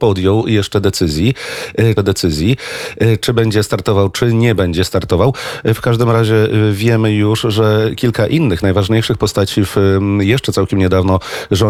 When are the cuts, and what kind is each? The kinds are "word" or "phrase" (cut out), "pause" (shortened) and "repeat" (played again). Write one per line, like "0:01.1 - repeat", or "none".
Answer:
0:02.0 - repeat

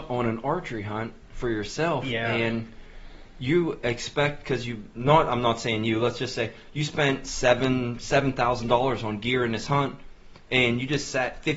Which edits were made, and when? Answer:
none

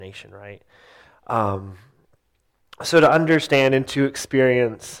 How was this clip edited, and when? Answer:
none

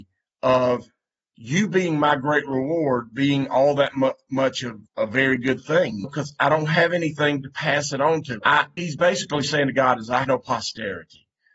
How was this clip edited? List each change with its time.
0:04.9 - pause
0:08.8 - word
0:10.2 - word

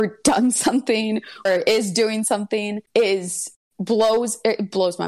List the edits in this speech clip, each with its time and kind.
0:01.5 - word
0:02.9 - pause

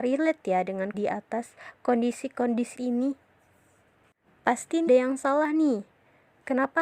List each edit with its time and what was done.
0:00.9 - word
0:02.7 - word
0:04.9 - word

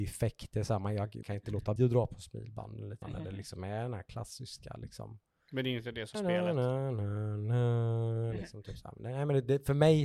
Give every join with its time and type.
0:01.2 - word
0:01.8 - word
0:03.0 - word
0:06.1 - word

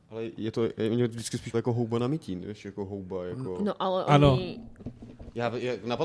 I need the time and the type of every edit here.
0:01.5 - word

